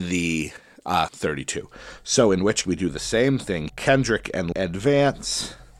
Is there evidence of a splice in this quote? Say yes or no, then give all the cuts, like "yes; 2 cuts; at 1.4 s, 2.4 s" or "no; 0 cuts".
yes; 4 cuts; at 1.1 s, 2.6 s, 3.7 s, 4.5 s